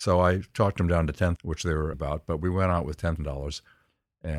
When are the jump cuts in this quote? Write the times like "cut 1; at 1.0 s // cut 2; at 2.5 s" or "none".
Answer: cut 1; at 1.4 s // cut 2; at 1.9 s // cut 3; at 3.2 s